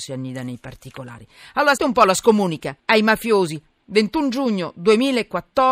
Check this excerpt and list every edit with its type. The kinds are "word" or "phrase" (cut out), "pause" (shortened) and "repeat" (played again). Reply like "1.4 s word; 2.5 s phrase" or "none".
1.8 s word; 2.8 s pause